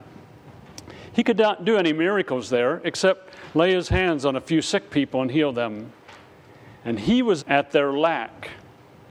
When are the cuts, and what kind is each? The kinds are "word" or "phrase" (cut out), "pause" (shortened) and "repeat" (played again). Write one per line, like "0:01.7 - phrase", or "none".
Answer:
0:07.4 - word